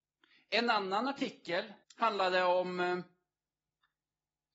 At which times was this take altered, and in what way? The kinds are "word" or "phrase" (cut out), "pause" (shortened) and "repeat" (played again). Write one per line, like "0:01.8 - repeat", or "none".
0:01.8 - pause